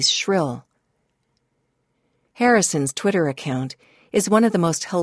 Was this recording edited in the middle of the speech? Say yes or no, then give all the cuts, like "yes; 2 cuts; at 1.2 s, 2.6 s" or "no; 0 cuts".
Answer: no; 0 cuts